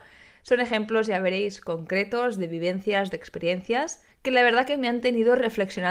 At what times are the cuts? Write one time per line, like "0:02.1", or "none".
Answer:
0:04.1